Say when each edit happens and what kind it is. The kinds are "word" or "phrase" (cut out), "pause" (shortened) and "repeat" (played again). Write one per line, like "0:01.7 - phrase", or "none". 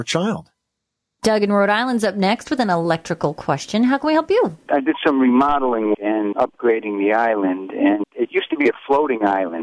0:05.9 - word
0:06.3 - word
0:08.0 - word